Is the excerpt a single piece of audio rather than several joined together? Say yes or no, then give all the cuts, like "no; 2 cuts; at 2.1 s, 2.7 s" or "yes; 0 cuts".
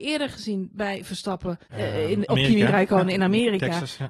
no; 2 cuts; at 1.6 s, 2.3 s